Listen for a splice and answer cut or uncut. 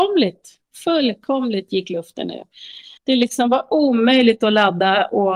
cut